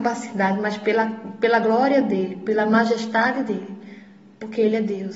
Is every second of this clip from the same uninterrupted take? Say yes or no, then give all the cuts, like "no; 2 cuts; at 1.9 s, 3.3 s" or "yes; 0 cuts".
yes; 0 cuts